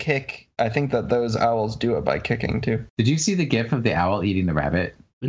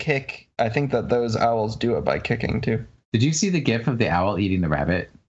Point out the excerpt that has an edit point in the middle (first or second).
first